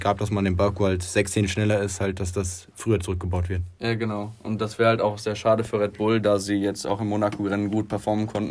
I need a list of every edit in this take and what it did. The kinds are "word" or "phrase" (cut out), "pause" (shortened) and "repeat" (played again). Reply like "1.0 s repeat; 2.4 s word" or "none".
none